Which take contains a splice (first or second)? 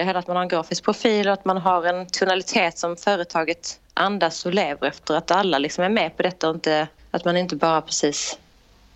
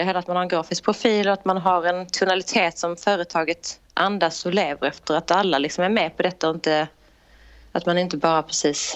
first